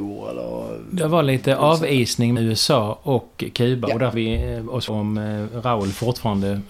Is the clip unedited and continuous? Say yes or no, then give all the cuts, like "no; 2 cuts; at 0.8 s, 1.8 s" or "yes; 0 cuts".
no; 3 cuts; at 2.4 s, 4.1 s, 4.9 s